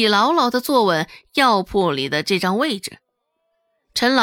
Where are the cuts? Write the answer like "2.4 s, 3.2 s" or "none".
none

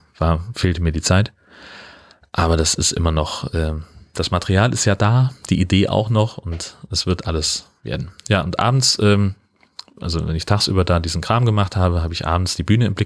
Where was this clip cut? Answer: none

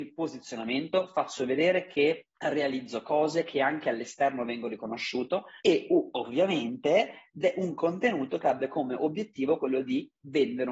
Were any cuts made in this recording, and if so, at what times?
2.4 s, 5.6 s

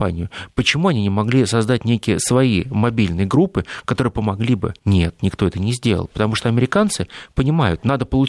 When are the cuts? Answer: 4.8 s

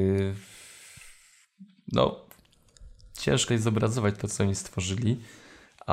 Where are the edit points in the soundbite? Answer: 3.5 s

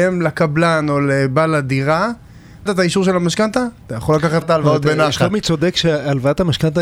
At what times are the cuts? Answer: 2.7 s, 4.4 s

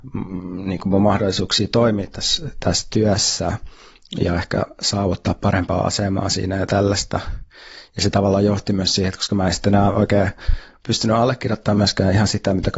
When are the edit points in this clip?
none

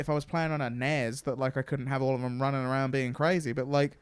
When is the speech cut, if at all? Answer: none

